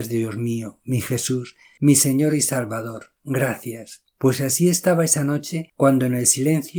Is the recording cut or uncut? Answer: cut